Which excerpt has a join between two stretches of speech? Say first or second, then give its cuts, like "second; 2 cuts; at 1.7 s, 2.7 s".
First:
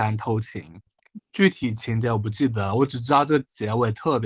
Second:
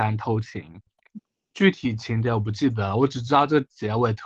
first; 1 cut; at 1.2 s